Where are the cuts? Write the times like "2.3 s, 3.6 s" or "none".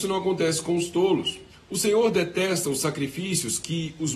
1.5 s